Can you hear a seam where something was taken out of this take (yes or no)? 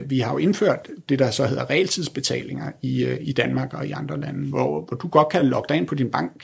no